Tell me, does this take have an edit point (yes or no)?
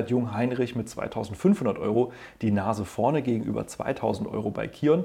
no